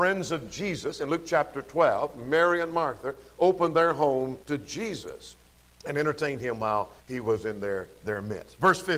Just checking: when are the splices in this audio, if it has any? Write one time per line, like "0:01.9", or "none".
0:04.4
0:05.5
0:07.0

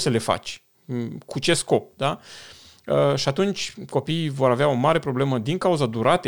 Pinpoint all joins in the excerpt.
none

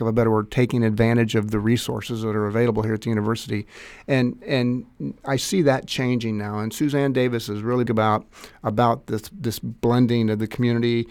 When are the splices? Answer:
0:05.2
0:07.9

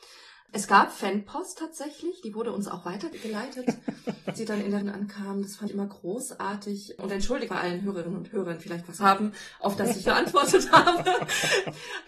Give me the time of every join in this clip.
0:04.4
0:04.8
0:05.7
0:07.5
0:08.6
0:09.0
0:10.0

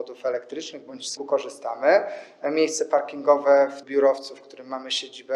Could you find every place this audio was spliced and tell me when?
0:01.2
0:03.8

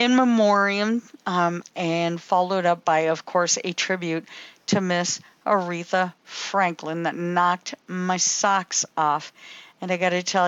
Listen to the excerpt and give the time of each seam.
0:01.6

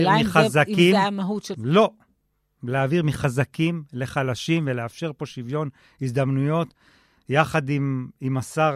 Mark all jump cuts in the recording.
0:01.5

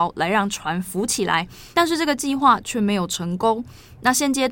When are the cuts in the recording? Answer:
0:01.7

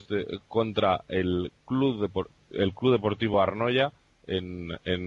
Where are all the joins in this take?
none

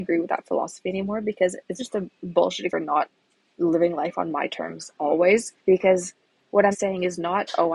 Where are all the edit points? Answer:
0:01.8
0:02.7
0:05.6
0:06.7

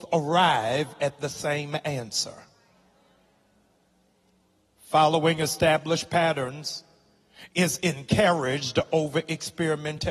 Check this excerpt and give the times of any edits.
none

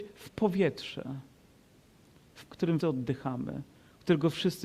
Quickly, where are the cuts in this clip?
0:02.5
0:02.8

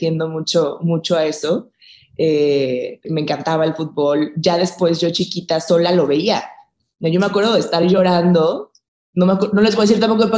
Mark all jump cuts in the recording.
0:03.0

